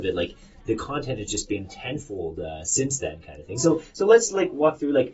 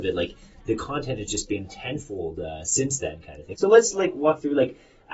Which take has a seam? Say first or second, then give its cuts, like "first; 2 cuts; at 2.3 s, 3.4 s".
second; 1 cut; at 3.5 s